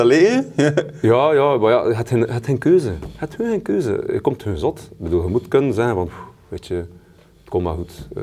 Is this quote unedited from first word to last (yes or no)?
yes